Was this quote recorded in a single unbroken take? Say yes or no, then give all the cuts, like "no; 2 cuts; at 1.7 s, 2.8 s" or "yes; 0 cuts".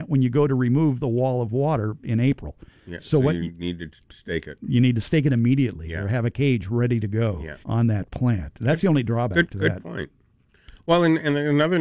no; 1 cut; at 7.6 s